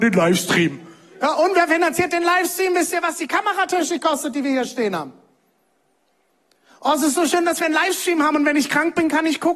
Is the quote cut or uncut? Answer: uncut